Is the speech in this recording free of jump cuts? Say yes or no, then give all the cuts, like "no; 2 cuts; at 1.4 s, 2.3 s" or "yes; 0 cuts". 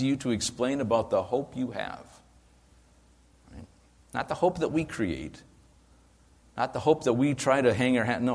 yes; 0 cuts